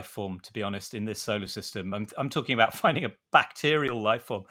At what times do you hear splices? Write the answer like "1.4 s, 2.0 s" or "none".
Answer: none